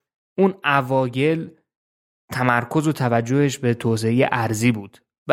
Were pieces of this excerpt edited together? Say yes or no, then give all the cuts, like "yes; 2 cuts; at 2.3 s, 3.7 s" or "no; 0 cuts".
no; 0 cuts